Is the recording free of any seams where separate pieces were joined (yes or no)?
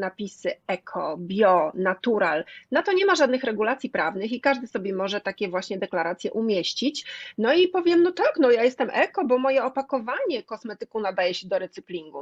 yes